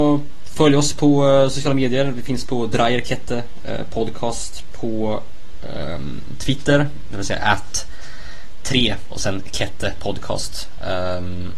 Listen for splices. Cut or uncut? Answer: uncut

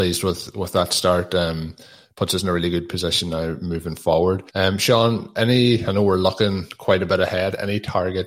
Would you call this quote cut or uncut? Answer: cut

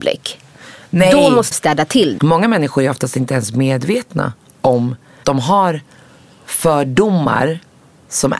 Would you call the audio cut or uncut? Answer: cut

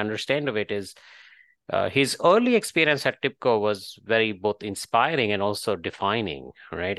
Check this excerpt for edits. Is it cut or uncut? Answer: uncut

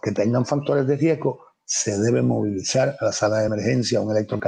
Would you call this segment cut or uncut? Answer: uncut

